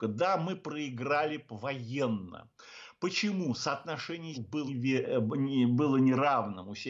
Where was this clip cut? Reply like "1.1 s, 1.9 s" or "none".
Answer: 4.3 s, 4.7 s